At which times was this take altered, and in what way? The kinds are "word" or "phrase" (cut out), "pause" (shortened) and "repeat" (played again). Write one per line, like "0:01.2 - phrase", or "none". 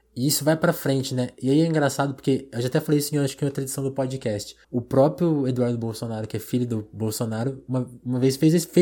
0:04.6 - pause